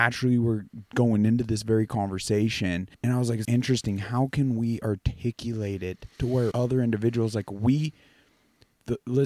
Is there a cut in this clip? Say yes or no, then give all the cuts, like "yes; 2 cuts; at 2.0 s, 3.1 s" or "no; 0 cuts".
yes; 4 cuts; at 2.9 s, 3.4 s, 6.1 s, 6.5 s